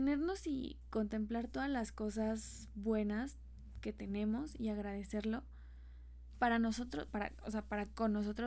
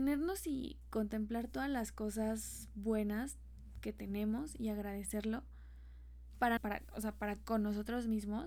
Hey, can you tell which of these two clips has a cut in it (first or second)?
second